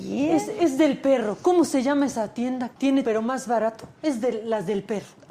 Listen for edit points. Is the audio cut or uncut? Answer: cut